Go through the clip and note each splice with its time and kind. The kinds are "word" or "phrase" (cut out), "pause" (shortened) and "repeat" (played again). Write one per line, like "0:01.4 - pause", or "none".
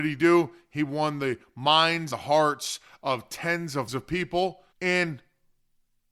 0:02.1 - word
0:03.9 - word
0:04.7 - pause